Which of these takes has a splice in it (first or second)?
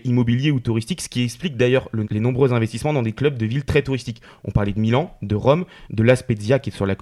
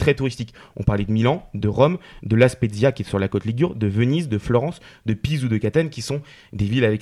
first